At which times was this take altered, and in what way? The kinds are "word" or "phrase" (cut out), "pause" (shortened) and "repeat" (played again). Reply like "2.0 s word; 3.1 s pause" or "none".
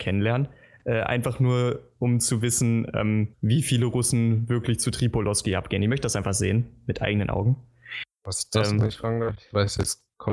3.3 s pause